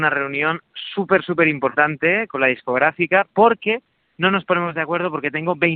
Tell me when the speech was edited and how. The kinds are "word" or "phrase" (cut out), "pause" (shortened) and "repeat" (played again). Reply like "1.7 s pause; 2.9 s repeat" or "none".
none